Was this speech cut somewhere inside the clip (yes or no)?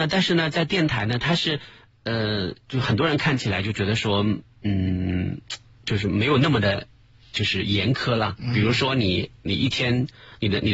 no